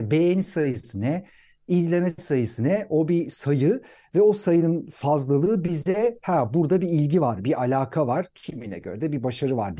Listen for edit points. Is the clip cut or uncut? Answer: uncut